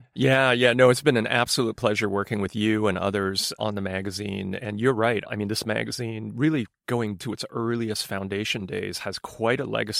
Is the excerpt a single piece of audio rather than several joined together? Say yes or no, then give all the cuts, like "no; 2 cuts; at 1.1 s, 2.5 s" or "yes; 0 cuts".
no; 3 cuts; at 3.6 s, 4.6 s, 7.2 s